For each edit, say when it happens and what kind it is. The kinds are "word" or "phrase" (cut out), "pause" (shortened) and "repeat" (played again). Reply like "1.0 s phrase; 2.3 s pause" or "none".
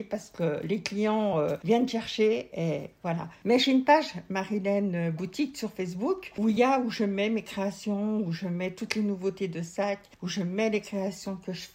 none